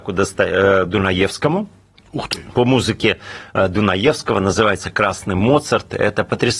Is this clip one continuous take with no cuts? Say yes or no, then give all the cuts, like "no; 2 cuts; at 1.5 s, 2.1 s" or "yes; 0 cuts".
yes; 0 cuts